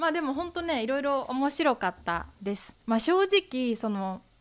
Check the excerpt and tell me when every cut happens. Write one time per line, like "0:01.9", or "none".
0:02.8